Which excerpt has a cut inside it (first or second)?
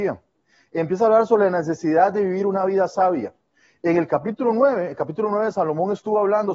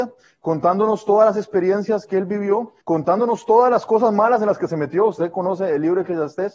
second